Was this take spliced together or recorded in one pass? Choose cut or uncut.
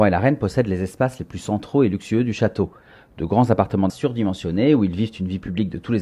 cut